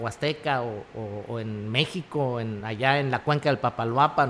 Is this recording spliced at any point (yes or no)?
no